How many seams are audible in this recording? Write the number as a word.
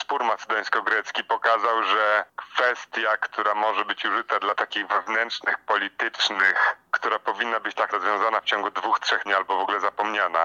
three